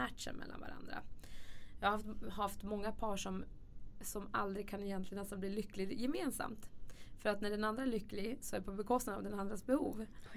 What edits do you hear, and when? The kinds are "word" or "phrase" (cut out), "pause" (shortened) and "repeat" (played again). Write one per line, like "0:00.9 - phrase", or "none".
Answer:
none